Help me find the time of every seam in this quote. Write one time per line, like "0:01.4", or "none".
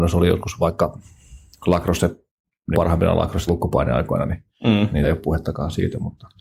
0:02.7
0:03.5
0:05.0